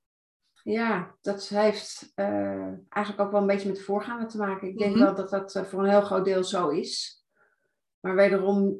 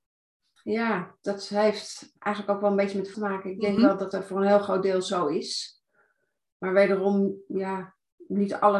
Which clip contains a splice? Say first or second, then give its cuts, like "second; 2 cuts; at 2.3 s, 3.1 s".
second; 3 cuts; at 2.2 s, 3.1 s, 4.1 s